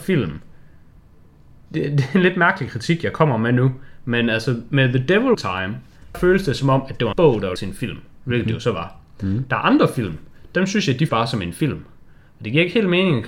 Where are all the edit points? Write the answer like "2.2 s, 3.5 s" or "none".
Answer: 5.3 s, 6.1 s, 7.1 s, 7.6 s, 11.1 s